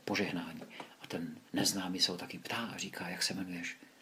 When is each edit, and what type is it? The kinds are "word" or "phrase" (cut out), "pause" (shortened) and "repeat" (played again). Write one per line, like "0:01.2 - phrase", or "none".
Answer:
0:01.5 - pause